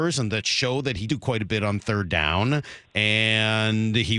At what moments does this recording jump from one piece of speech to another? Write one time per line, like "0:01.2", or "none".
0:01.1